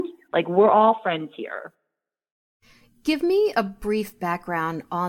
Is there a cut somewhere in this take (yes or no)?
no